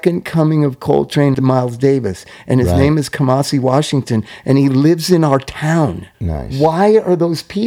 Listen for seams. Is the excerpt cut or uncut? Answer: cut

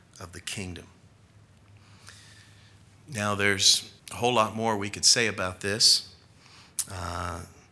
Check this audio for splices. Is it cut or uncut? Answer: cut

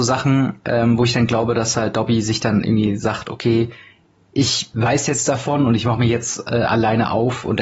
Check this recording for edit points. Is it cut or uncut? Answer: uncut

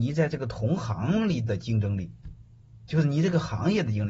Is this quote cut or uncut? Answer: uncut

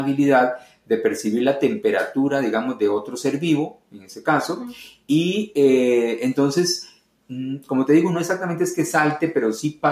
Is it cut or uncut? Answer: uncut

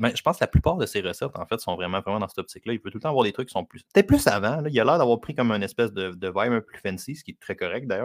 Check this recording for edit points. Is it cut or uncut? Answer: cut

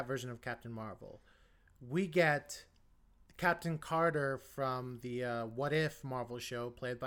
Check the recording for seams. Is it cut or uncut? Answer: uncut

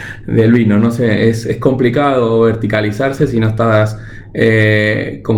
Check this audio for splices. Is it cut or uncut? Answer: uncut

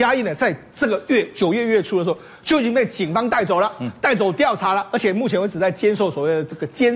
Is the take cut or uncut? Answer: uncut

